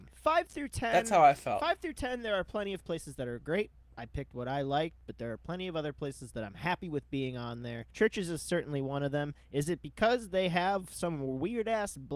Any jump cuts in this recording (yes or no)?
yes